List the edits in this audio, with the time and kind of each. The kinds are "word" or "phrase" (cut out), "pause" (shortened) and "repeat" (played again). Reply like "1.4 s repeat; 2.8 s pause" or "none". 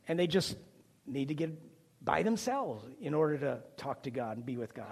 none